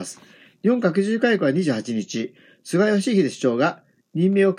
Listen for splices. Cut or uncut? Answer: uncut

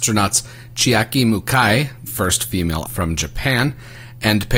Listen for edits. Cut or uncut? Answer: cut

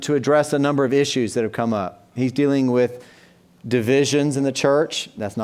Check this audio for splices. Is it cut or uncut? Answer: uncut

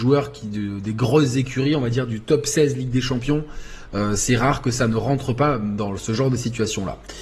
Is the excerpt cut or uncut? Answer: uncut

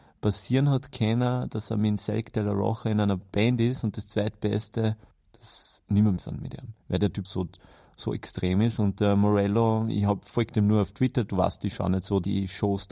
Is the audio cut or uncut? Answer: cut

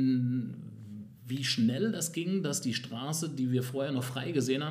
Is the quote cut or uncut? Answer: uncut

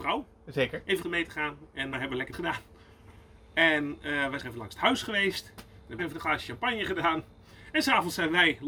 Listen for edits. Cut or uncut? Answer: cut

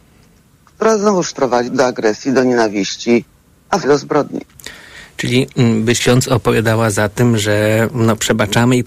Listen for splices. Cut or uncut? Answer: cut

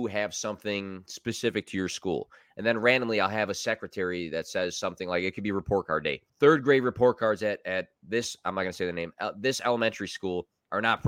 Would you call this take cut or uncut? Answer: cut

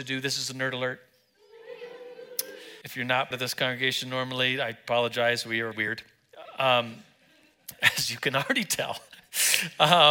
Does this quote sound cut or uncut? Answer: cut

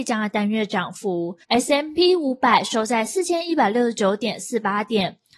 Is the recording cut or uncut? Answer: cut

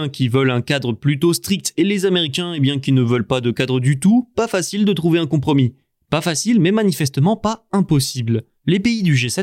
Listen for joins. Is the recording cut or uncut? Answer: uncut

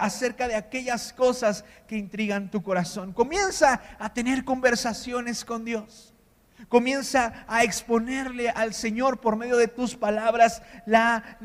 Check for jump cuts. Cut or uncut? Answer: uncut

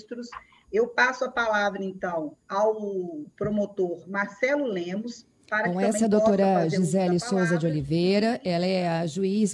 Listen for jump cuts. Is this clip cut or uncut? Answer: cut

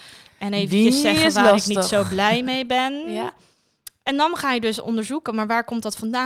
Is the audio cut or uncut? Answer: uncut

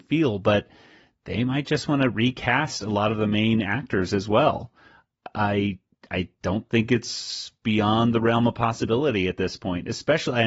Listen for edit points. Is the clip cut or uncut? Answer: uncut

